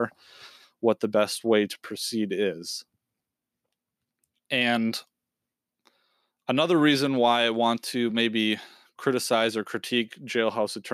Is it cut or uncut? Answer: uncut